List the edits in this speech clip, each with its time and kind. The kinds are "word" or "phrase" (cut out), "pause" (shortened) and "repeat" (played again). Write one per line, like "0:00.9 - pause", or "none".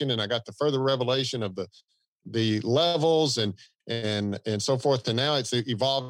none